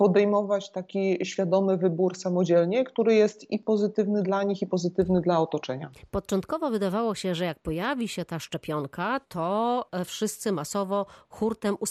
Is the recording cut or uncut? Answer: uncut